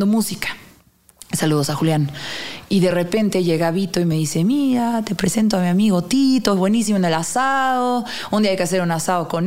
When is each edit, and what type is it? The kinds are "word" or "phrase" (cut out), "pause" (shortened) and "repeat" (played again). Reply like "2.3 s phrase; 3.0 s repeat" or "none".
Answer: none

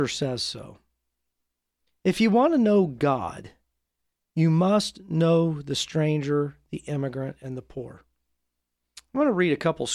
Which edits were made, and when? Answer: none

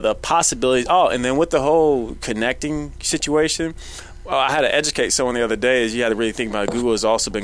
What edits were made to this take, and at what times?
none

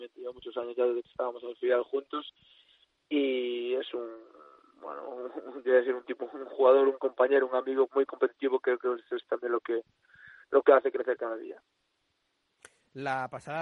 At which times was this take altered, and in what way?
7.9 s word

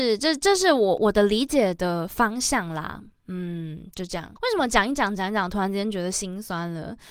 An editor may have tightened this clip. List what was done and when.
4.4 s pause

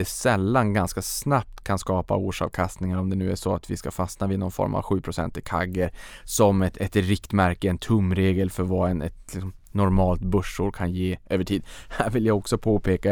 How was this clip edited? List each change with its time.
none

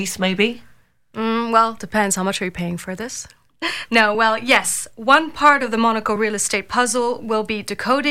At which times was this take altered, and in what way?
none

